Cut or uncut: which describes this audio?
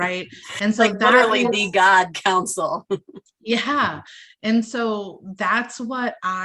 uncut